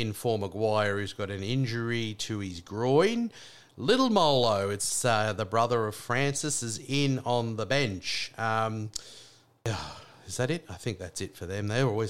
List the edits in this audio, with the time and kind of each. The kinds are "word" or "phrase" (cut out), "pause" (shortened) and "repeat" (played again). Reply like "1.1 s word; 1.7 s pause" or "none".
none